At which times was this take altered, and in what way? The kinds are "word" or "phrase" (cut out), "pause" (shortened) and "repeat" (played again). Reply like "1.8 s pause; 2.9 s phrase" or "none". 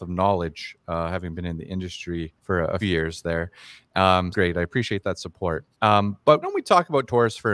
2.4 s pause; 2.8 s word; 4.3 s phrase; 5.7 s pause; 6.4 s word